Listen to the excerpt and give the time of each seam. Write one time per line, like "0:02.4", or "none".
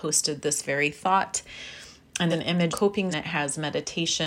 0:02.3
0:02.7
0:03.1